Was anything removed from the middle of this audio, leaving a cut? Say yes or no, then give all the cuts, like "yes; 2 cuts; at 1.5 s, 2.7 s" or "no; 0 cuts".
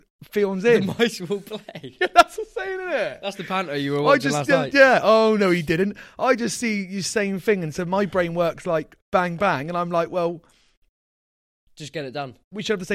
no; 0 cuts